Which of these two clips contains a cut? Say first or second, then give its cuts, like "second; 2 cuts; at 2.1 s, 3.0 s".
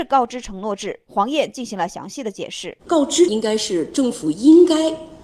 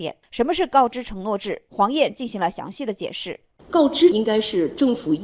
first; 1 cut; at 2.8 s